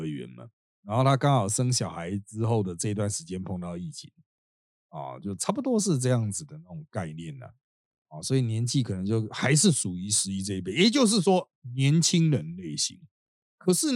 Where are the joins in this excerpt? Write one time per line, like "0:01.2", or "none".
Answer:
none